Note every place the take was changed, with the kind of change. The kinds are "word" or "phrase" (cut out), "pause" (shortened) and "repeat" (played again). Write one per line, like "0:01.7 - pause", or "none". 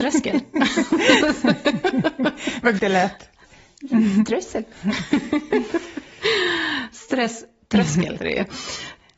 0:02.8 - word
0:08.2 - word